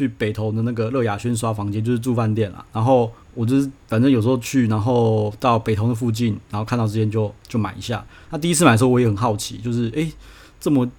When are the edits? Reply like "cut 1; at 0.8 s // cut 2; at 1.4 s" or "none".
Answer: cut 1; at 3.2 s // cut 2; at 3.8 s